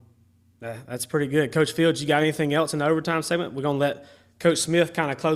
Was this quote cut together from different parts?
no; 0 cuts

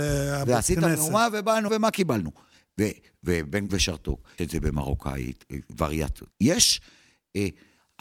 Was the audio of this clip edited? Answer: yes; 4 cuts; at 1.7 s, 3.7 s, 4.4 s, 6.3 s

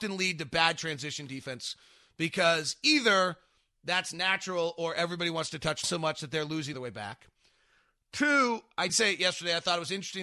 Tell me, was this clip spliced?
yes; 3 cuts; at 5.8 s, 6.7 s, 8.9 s

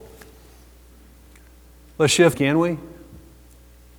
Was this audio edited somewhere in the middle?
yes; 1 cut; at 2.3 s

